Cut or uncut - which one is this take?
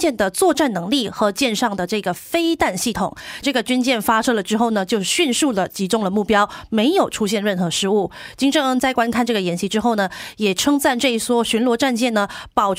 cut